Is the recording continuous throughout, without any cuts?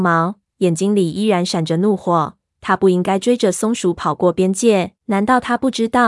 no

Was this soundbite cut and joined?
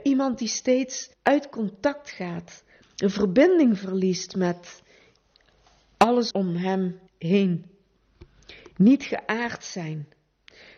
yes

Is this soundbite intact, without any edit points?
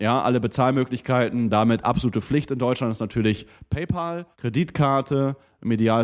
no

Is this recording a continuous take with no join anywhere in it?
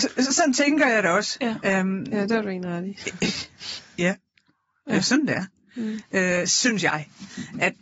yes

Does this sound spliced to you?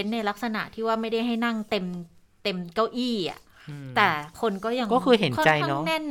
no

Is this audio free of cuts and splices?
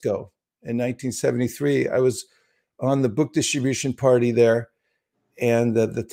yes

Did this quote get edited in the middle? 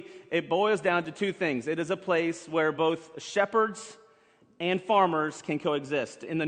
no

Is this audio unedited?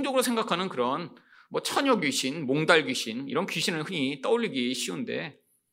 yes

